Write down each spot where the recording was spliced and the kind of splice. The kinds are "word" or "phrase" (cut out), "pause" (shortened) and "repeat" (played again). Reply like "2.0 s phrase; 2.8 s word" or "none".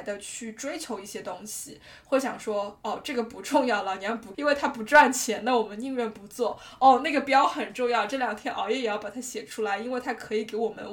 4.3 s word